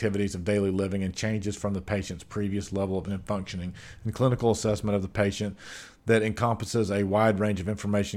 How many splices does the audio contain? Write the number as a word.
one